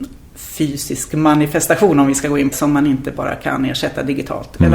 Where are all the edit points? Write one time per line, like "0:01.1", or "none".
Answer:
0:02.5